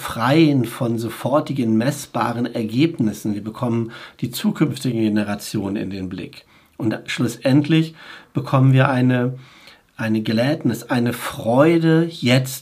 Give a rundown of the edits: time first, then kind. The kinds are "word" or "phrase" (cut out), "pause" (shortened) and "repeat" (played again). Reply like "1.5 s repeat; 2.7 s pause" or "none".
none